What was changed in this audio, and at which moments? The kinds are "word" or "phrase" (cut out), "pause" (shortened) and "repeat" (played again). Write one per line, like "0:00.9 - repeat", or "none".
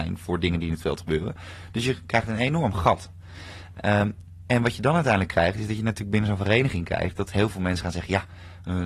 none